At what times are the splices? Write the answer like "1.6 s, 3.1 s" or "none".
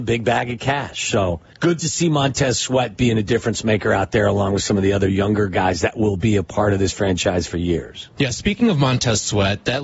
1.5 s